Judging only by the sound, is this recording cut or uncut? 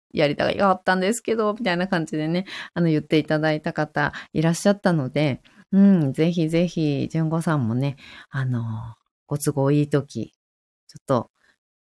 uncut